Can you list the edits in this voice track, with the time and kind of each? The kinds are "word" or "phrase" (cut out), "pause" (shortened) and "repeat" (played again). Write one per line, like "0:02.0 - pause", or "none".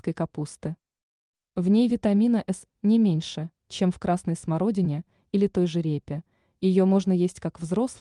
none